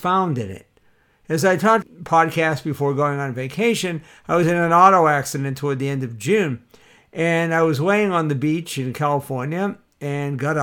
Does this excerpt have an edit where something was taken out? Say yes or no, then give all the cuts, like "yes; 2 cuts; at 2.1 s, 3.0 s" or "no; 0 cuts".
yes; 1 cut; at 1.8 s